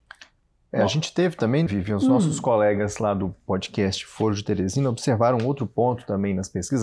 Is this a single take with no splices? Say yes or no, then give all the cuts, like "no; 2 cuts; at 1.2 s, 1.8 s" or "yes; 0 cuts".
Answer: no; 1 cut; at 1.7 s